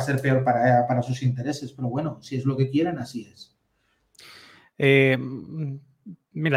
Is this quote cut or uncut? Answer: uncut